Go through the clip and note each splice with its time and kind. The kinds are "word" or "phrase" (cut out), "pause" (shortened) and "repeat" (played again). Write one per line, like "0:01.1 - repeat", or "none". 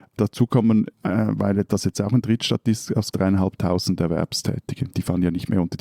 0:00.9 - pause
0:03.1 - phrase